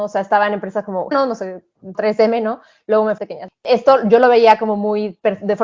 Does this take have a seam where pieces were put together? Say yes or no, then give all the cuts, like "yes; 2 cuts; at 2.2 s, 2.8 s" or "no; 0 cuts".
yes; 3 cuts; at 1.1 s, 1.9 s, 3.2 s